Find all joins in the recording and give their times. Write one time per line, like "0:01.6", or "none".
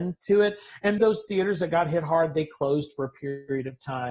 0:01.0